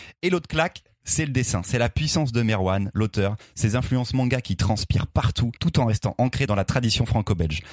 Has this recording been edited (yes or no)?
yes